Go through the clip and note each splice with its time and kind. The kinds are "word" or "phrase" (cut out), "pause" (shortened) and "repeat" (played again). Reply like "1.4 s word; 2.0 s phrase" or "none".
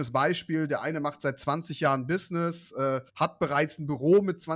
3.1 s pause